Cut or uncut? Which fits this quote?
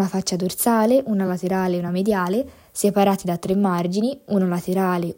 uncut